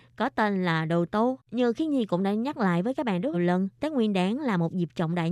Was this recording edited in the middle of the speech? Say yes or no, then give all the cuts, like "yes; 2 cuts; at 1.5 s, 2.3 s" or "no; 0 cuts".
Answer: yes; 3 cuts; at 1.5 s, 3.3 s, 3.8 s